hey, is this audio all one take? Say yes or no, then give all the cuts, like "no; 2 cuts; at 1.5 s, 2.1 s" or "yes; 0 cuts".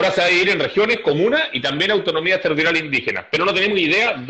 yes; 0 cuts